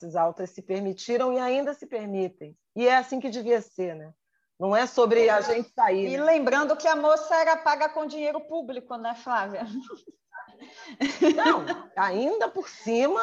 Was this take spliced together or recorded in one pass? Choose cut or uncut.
uncut